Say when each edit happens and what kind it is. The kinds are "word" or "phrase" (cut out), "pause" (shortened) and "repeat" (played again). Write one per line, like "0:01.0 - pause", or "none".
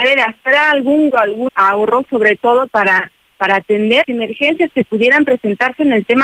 0:01.1 - word
0:01.5 - word
0:02.7 - word
0:04.0 - word